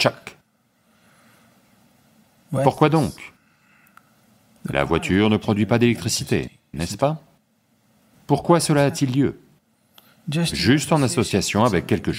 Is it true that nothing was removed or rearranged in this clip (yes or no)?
yes